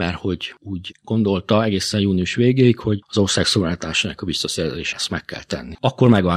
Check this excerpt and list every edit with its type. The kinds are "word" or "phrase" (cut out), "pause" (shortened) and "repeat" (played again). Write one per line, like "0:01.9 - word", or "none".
0:04.9 - word